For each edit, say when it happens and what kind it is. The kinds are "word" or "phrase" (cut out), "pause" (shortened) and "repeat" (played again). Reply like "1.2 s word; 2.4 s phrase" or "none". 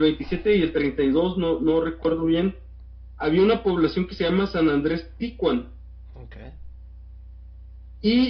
none